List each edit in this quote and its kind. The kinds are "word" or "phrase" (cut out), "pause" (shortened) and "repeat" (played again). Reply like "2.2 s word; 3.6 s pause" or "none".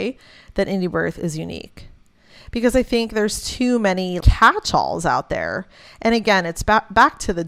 4.2 s word